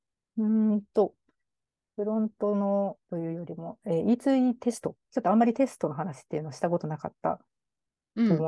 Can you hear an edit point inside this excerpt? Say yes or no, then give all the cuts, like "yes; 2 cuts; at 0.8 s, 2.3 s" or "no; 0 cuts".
yes; 1 cut; at 3.0 s